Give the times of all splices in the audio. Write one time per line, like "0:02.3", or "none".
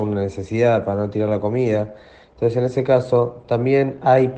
none